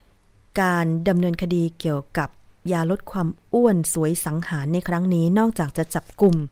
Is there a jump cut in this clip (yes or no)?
no